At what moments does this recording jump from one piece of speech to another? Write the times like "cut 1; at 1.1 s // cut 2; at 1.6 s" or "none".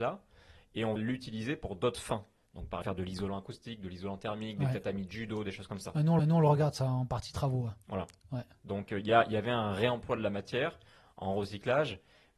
cut 1; at 1.0 s // cut 2; at 2.8 s // cut 3; at 6.2 s